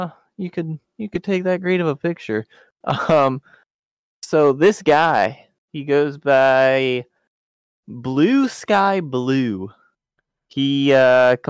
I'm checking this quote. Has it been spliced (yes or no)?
yes